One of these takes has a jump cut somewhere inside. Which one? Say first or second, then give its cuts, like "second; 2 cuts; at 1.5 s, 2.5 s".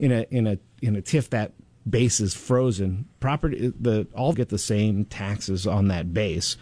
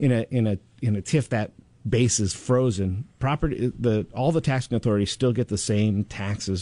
first; 1 cut; at 4.3 s